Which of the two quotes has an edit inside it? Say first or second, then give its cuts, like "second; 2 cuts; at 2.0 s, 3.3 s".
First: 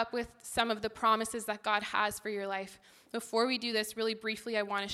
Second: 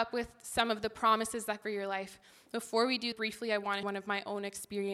second; 3 cuts; at 1.6 s, 3.1 s, 3.8 s